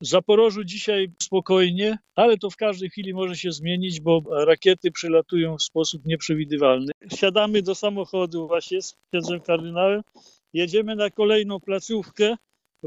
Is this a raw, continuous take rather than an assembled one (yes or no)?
yes